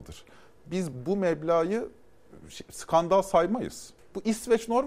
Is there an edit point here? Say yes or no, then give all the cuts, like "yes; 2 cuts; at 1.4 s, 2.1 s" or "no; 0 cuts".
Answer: no; 0 cuts